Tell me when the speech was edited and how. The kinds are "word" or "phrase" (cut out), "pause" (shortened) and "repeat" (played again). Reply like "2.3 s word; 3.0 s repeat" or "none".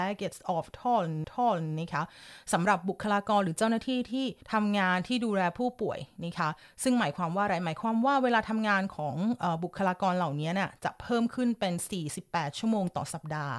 1.2 s repeat; 4.4 s pause